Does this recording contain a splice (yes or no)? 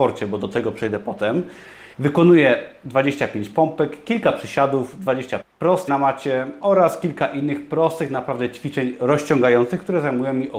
yes